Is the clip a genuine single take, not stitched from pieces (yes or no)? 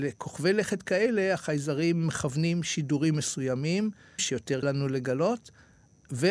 no